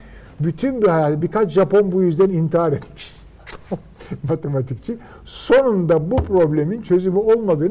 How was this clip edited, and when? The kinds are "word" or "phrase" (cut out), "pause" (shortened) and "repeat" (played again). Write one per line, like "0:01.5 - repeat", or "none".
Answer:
none